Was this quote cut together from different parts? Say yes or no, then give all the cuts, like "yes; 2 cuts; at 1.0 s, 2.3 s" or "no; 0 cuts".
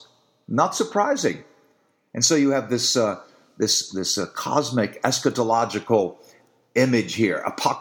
no; 0 cuts